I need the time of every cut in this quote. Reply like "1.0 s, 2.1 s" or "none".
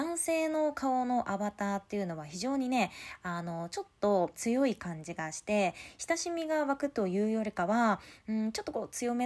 4.3 s